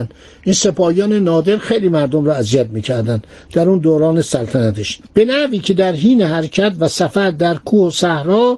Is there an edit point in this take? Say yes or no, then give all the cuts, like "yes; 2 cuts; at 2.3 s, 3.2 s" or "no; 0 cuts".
no; 0 cuts